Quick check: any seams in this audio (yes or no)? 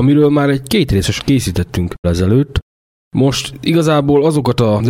yes